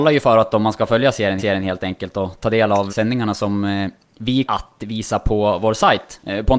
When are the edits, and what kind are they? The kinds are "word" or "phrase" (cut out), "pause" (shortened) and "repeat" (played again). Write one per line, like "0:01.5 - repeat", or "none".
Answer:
0:01.4 - repeat
0:02.9 - word
0:04.4 - word